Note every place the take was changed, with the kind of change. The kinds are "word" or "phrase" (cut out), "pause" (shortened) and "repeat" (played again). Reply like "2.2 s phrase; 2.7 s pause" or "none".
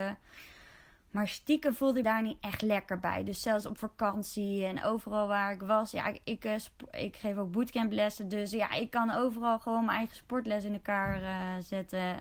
2.0 s word